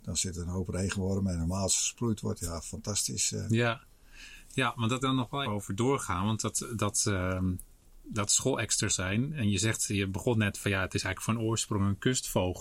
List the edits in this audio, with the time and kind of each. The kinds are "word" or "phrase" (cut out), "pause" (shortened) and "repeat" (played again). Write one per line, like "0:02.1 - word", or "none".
0:05.0 - phrase
0:05.4 - word
0:08.9 - word